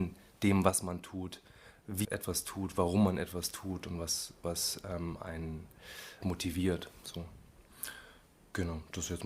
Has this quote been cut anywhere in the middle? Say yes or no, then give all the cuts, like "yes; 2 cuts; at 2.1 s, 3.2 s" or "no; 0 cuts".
yes; 2 cuts; at 2.0 s, 6.2 s